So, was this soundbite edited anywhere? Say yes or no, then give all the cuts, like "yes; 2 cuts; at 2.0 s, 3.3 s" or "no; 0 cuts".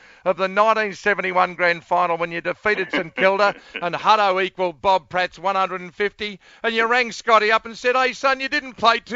no; 0 cuts